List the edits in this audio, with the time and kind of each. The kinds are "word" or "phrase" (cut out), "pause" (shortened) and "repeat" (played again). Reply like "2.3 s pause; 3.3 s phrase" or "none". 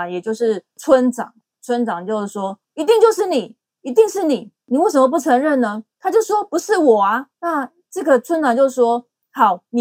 2.6 s pause; 5.9 s pause; 7.3 s pause